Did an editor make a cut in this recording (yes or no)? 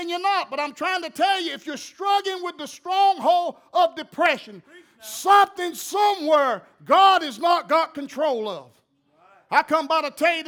no